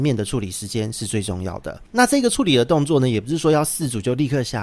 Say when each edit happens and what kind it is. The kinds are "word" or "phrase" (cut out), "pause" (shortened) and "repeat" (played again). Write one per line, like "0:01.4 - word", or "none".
0:01.9 - pause